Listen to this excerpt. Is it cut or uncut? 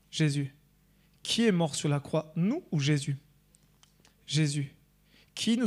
uncut